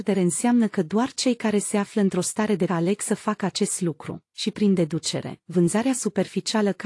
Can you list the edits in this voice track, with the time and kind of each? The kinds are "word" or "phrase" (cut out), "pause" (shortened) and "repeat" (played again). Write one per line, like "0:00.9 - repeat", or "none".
0:02.7 - word